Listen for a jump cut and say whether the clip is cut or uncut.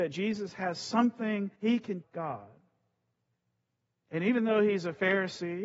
cut